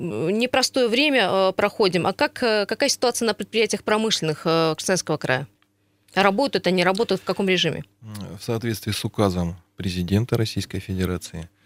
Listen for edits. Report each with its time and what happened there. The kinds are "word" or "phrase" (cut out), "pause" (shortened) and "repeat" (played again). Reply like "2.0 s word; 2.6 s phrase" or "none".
none